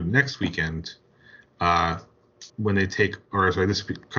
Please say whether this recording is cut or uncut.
cut